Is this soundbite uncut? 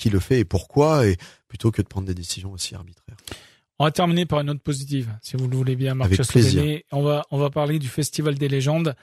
yes; 0 cuts

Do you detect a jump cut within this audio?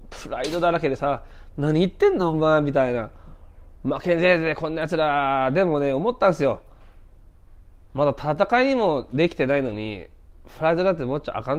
no; 0 cuts

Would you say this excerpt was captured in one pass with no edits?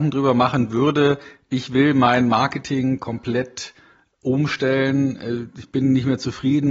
yes; 0 cuts

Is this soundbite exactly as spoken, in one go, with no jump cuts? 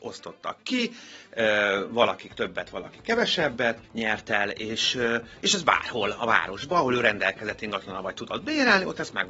no; 1 cut; at 3.8 s

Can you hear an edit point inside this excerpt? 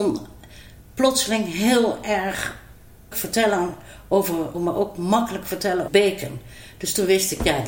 yes; 3 cuts; at 3.1 s, 4.5 s, 5.9 s

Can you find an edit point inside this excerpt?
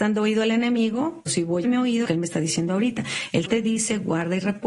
yes; 4 cuts; at 1.3 s, 1.6 s, 2.1 s, 3.5 s

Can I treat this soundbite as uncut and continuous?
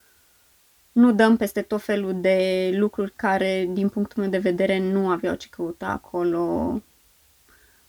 yes; 0 cuts

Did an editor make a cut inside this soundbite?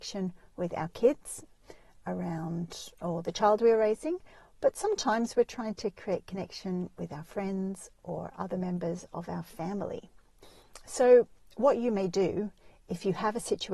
no; 0 cuts

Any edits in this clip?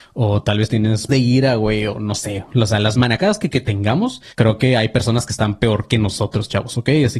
yes; 3 cuts; at 1.1 s, 3.5 s, 4.3 s

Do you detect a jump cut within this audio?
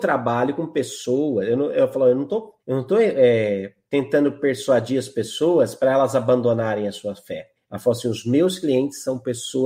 yes; 2 cuts; at 2.6 s, 7.6 s

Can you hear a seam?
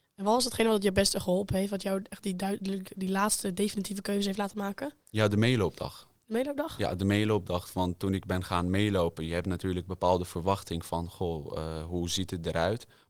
yes; 1 cut; at 5.0 s

